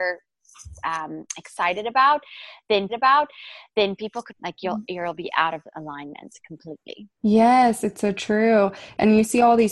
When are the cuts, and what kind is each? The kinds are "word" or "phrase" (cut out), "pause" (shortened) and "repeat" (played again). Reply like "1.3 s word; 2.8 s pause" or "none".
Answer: 2.9 s repeat; 4.3 s phrase; 7.1 s pause